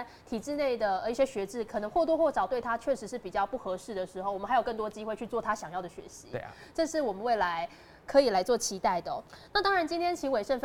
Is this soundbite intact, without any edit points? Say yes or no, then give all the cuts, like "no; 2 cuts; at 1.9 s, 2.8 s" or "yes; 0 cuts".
yes; 0 cuts